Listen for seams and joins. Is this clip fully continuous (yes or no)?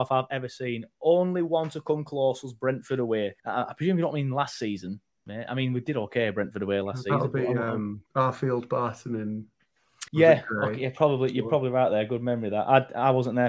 no